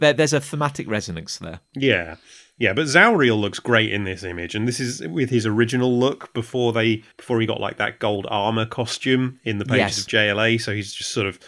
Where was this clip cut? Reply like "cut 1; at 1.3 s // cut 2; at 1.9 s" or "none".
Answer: cut 1; at 1.7 s // cut 2; at 7.1 s